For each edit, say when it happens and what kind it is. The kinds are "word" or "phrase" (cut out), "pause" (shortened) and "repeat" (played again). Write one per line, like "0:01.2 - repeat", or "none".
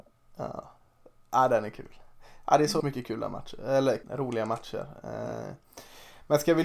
0:02.8 - word
0:04.0 - word